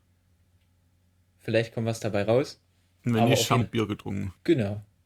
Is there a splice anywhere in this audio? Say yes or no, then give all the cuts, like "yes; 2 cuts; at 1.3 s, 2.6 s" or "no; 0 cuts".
yes; 1 cut; at 3.6 s